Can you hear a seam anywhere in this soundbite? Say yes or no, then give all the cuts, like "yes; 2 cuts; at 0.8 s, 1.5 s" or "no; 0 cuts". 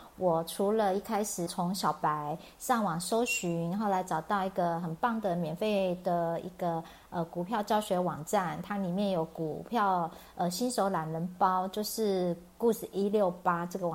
yes; 1 cut; at 1.5 s